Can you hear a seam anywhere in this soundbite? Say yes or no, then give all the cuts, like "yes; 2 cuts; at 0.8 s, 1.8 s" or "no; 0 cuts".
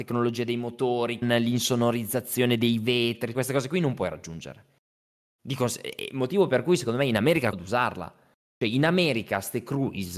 yes; 3 cuts; at 1.2 s, 3.3 s, 7.5 s